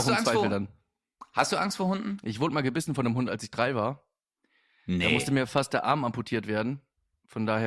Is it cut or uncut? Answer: uncut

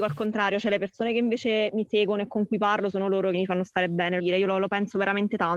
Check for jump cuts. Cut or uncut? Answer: cut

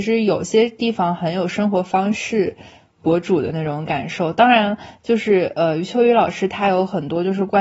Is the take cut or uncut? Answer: uncut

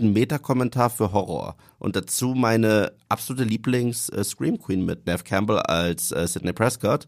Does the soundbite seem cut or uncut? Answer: uncut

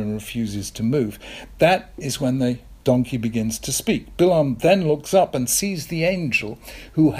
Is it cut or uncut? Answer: uncut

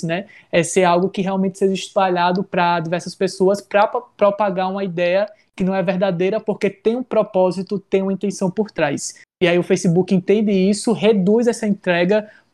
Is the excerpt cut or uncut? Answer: uncut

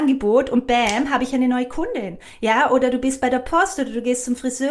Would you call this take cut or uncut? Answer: uncut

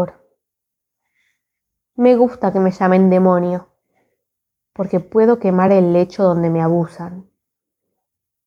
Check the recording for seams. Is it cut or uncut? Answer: uncut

